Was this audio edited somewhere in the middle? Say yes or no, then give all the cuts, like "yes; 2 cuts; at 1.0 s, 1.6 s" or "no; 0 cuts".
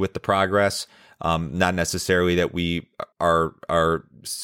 yes; 1 cut; at 3.1 s